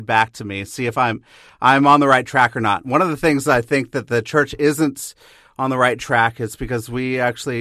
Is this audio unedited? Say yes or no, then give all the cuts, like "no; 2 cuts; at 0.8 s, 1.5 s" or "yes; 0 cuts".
yes; 0 cuts